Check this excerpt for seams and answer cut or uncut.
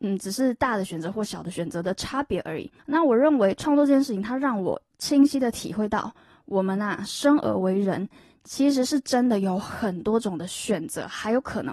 cut